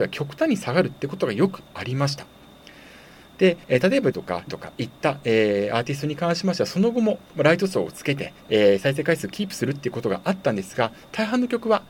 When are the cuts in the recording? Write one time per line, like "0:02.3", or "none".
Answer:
0:03.6
0:04.1
0:04.5
0:07.3
0:08.4